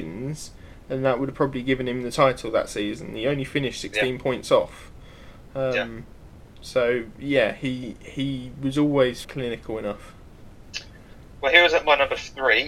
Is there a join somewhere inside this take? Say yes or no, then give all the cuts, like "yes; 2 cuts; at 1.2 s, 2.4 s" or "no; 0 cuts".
yes; 1 cut; at 9.2 s